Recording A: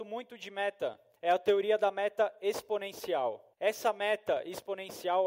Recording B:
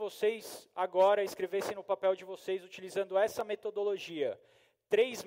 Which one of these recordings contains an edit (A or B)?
A